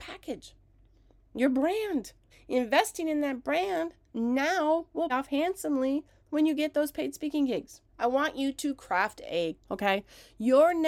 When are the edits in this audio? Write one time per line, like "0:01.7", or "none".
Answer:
0:02.3
0:05.1
0:07.9
0:09.6